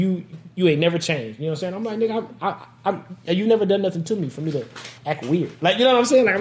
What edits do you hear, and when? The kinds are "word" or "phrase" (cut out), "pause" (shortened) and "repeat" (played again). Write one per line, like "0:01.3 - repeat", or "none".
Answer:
0:05.0 - pause